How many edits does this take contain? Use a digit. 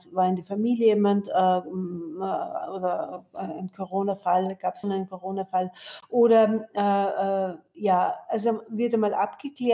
1